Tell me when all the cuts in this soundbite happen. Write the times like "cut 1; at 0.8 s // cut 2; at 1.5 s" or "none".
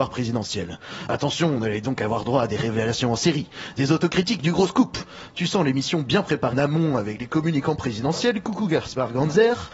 cut 1; at 6.5 s

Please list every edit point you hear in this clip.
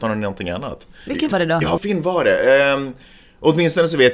cut 1; at 1.3 s // cut 2; at 1.8 s

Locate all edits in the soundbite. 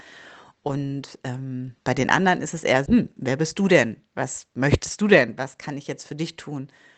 cut 1; at 1.8 s // cut 2; at 2.9 s

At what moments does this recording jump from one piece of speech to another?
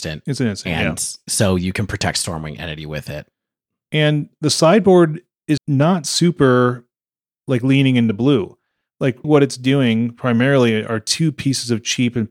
cut 1; at 5.6 s // cut 2; at 9.2 s

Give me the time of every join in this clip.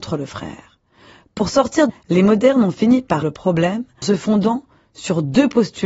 cut 1; at 1.9 s // cut 2; at 3.2 s // cut 3; at 4.0 s

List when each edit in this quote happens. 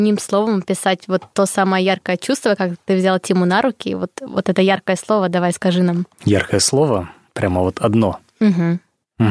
none

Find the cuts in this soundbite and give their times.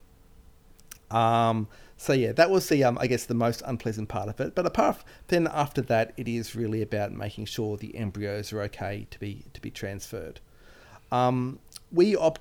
none

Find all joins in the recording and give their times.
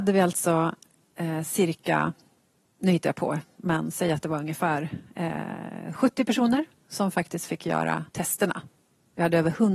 cut 1; at 8.1 s

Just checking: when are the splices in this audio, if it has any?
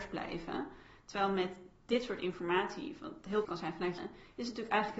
cut 1; at 3.4 s // cut 2; at 4.0 s

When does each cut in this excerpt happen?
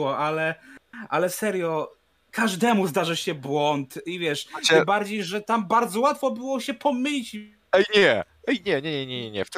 none

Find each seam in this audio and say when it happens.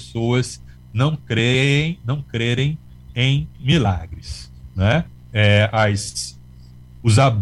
cut 1; at 3.5 s

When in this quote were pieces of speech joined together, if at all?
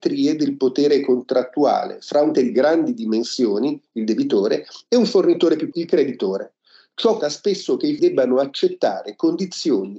cut 1; at 2.3 s // cut 2; at 5.7 s // cut 3; at 7.2 s // cut 4; at 8.0 s

